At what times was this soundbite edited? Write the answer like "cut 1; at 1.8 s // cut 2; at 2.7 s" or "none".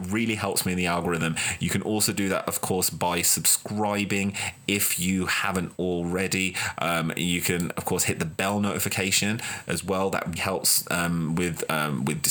cut 1; at 10.4 s

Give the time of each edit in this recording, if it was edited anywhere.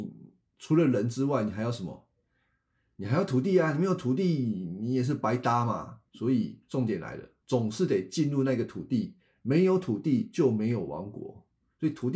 cut 1; at 6.1 s // cut 2; at 7.4 s

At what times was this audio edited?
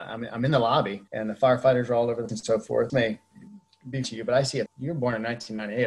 cut 1; at 1.1 s // cut 2; at 2.3 s // cut 3; at 2.9 s // cut 4; at 4.0 s // cut 5; at 4.7 s

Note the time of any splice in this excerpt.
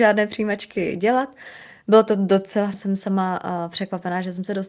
cut 1; at 2.7 s

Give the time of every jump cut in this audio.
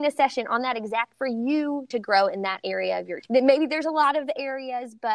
cut 1; at 1.1 s // cut 2; at 1.9 s // cut 3; at 3.2 s

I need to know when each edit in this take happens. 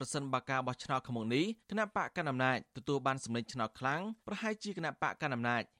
cut 1; at 1.6 s // cut 2; at 4.2 s

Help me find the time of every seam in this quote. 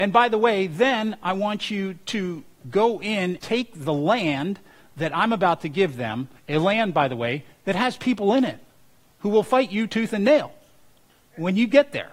cut 1; at 3.4 s // cut 2; at 6.4 s

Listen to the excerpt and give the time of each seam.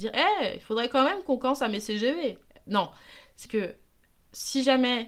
cut 1; at 3.5 s

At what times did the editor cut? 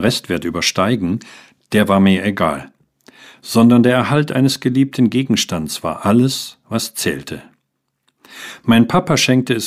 none

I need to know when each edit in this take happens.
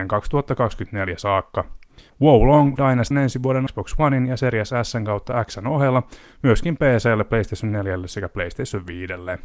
cut 1; at 2.1 s // cut 2; at 2.8 s // cut 3; at 3.1 s // cut 4; at 3.7 s

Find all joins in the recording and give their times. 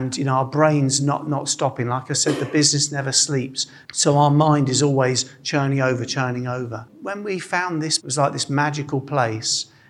cut 1; at 8.0 s

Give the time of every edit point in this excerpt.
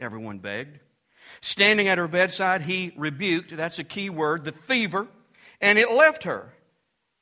none

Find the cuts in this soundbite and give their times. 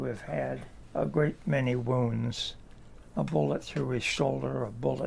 none

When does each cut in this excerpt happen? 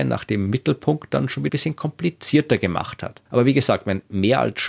cut 1; at 1.5 s // cut 2; at 3.3 s

